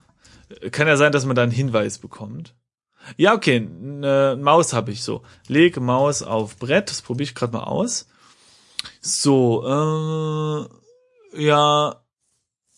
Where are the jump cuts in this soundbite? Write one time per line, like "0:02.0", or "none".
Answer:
none